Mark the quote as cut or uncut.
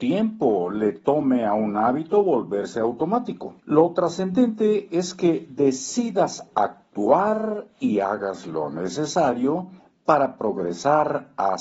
cut